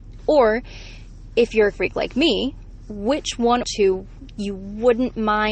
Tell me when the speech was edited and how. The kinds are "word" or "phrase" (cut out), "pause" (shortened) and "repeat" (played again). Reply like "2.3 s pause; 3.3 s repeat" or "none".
1.7 s word; 3.6 s word